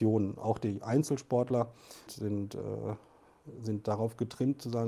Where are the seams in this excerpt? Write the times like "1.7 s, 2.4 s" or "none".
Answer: 2.1 s